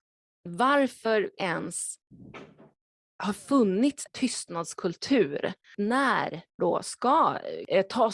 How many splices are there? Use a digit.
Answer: 3